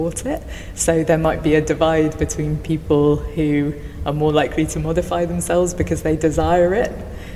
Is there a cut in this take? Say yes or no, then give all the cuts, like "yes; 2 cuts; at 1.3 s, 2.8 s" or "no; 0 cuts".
no; 0 cuts